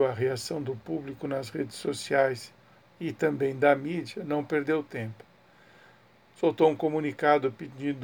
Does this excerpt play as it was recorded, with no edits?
yes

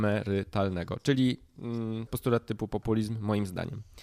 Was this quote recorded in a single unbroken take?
no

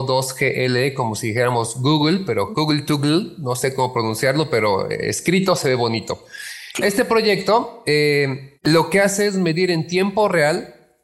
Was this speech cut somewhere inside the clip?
yes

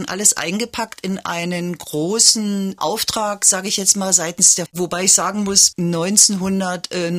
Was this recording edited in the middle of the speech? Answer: yes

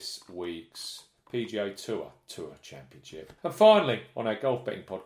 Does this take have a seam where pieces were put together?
yes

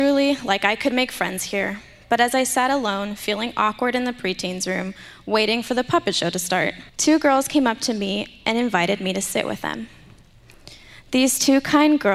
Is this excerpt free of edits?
no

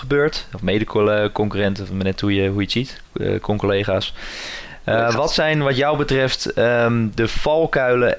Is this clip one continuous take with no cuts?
yes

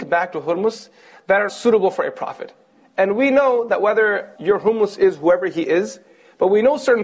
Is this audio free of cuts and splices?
no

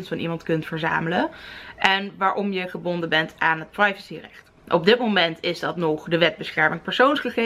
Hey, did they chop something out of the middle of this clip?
yes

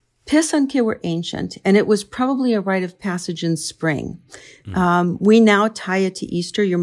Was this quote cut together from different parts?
no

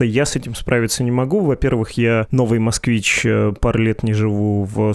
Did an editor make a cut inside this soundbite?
no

